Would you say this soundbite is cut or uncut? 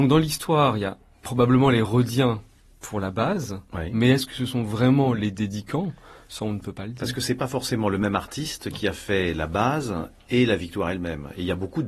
uncut